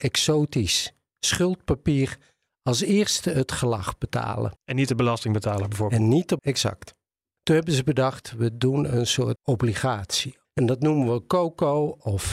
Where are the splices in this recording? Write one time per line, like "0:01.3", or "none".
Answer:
0:04.6
0:06.4
0:09.4